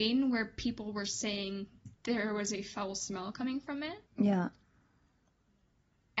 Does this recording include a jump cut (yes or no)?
yes